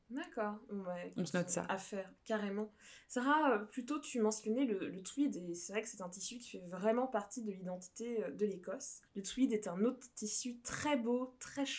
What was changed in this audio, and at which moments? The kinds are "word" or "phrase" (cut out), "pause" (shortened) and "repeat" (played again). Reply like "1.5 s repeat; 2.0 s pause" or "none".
9.1 s pause